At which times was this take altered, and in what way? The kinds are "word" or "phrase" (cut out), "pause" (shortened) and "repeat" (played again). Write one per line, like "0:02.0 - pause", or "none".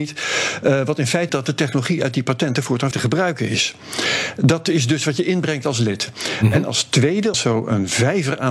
0:01.3 - word
0:02.9 - word
0:07.3 - word